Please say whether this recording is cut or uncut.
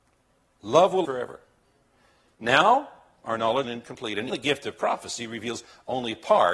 cut